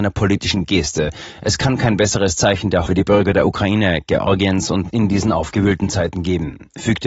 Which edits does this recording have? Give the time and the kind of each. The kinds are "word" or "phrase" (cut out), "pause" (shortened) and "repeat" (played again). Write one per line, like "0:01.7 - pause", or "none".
0:02.9 - word
0:04.9 - word